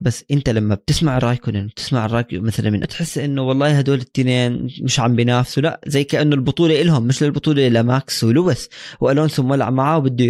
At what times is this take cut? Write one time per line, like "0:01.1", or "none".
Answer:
0:01.2
0:02.8